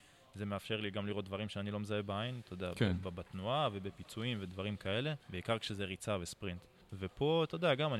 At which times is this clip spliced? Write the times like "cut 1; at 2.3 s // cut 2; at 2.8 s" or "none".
cut 1; at 5.2 s // cut 2; at 6.8 s